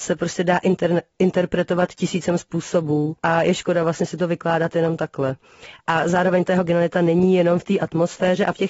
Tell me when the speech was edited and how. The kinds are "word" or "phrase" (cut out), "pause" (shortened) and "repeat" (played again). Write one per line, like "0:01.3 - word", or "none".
0:03.2 - pause